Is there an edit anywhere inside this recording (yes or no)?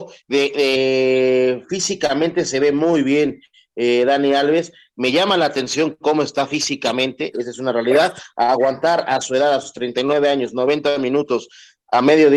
no